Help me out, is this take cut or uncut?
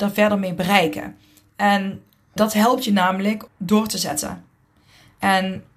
cut